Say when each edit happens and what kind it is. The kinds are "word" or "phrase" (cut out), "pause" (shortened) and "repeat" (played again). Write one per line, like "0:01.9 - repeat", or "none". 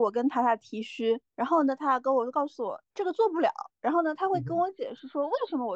0:01.3 - pause